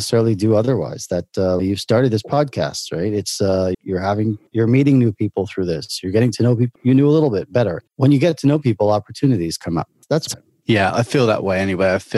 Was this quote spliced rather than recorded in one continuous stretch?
yes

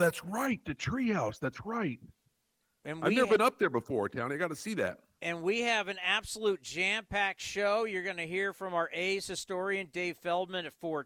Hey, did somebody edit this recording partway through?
no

